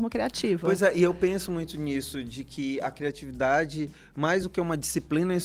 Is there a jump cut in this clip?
no; 0 cuts

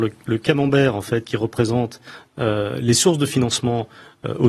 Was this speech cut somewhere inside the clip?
no; 0 cuts

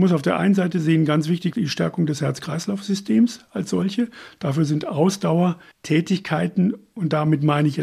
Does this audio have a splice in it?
yes; 2 cuts; at 1.5 s, 5.7 s

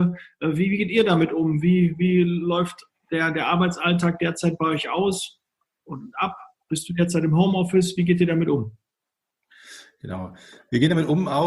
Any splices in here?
no; 0 cuts

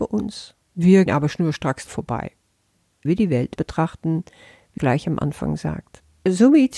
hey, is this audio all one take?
no; 5 cuts; at 1.1 s, 1.9 s, 3.0 s, 3.5 s, 4.8 s

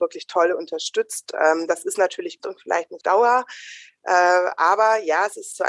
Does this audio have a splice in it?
yes; 2 cuts; at 2.4 s, 3.0 s

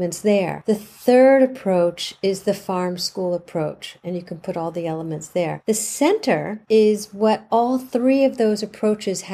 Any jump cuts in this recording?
no; 0 cuts

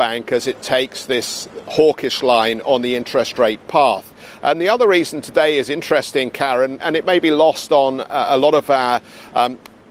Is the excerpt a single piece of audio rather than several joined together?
no; 1 cut; at 6.8 s

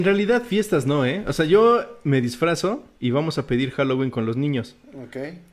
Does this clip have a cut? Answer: yes; 1 cut; at 3.0 s

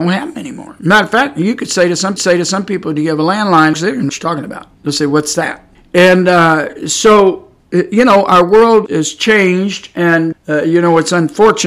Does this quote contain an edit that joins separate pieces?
yes; 8 cuts; at 2.2 s, 3.7 s, 4.1 s, 4.7 s, 5.8 s, 7.6 s, 8.9 s, 10.3 s

